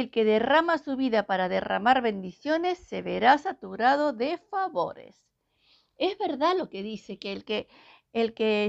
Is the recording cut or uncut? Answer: uncut